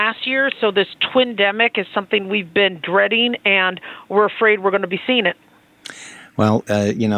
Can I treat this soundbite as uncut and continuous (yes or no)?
yes